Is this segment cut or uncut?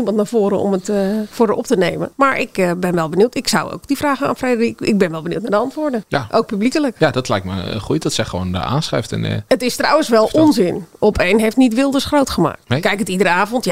uncut